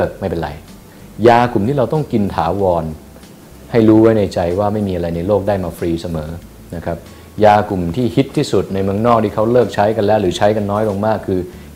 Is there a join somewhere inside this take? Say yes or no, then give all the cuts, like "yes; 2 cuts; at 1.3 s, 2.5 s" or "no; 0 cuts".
no; 0 cuts